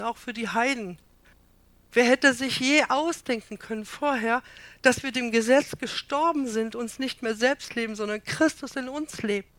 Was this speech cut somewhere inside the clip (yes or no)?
no